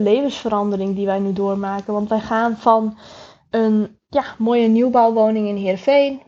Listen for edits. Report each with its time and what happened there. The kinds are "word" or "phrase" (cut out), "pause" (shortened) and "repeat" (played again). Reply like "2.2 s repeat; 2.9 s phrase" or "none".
none